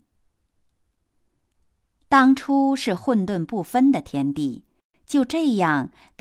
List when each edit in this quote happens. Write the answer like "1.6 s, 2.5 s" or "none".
none